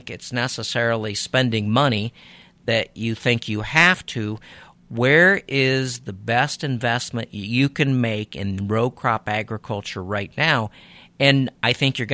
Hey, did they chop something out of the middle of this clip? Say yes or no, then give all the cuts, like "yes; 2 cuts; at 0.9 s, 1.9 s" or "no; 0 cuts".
no; 0 cuts